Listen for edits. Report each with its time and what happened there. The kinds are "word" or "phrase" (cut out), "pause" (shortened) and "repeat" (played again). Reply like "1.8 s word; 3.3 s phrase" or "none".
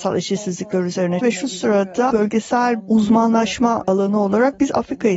1.2 s word; 2.1 s word

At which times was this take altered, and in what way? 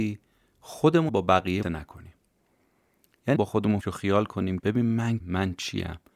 1.1 s word; 1.6 s word; 3.4 s word; 3.8 s word; 4.6 s word; 5.2 s word

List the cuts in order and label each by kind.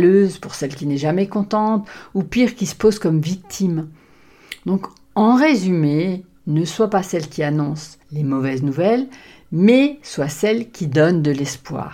8.0 s pause

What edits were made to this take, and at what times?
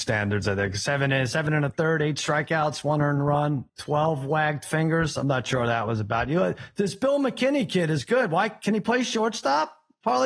3.7 s pause

